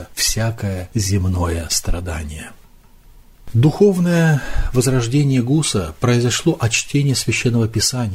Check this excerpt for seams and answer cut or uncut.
uncut